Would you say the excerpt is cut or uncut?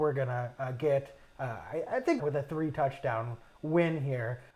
cut